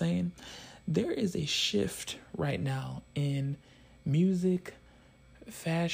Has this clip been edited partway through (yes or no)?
no